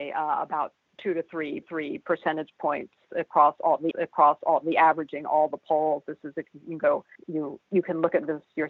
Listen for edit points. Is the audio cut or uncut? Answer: cut